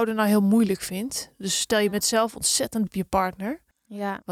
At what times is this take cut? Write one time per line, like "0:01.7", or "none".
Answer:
0:02.9